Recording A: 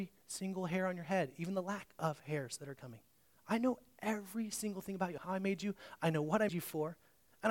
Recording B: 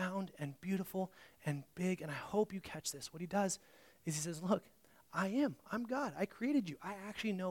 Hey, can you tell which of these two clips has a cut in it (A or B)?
A